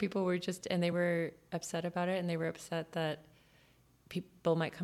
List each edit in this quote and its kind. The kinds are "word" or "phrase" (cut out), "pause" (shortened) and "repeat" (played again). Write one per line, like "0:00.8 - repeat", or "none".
none